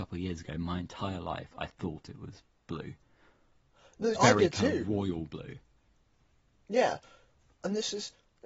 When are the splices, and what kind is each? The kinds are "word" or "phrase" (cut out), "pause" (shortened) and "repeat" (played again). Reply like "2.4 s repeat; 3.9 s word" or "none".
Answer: 4.1 s word